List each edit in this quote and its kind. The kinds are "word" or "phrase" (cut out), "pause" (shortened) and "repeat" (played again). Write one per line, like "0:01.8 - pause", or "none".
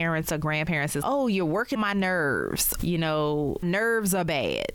0:01.0 - word
0:01.8 - word
0:02.8 - word
0:03.6 - word